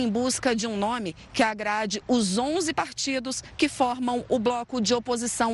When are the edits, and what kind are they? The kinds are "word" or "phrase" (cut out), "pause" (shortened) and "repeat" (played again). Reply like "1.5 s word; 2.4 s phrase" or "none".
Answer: none